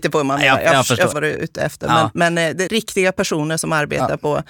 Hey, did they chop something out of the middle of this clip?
yes; 2 cuts; at 1.1 s, 2.7 s

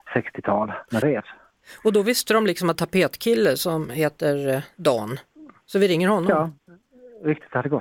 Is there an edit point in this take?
yes; 2 cuts; at 1.0 s, 2.7 s

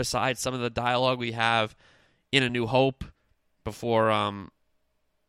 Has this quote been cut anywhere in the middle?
no; 0 cuts

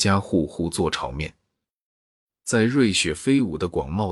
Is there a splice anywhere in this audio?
no; 0 cuts

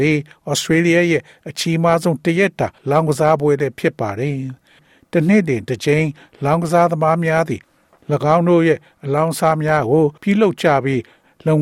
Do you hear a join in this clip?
yes; 2 cuts; at 2.8 s, 10.2 s

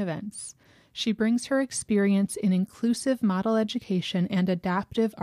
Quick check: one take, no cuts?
yes; 0 cuts

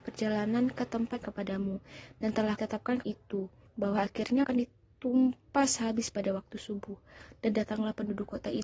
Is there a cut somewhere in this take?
yes; 5 cuts; at 1.2 s, 2.6 s, 3.0 s, 3.7 s, 4.4 s

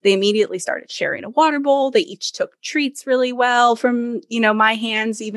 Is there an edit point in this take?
no; 0 cuts

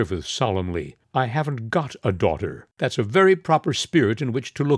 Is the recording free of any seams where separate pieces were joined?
no; 2 cuts; at 1.0 s, 2.7 s

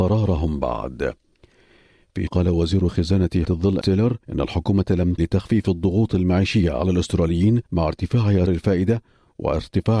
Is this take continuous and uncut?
no; 7 cuts; at 2.3 s, 3.4 s, 3.8 s, 4.2 s, 5.2 s, 7.7 s, 8.5 s

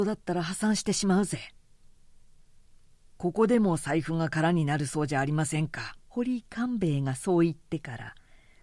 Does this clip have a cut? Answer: yes; 1 cut; at 6.0 s

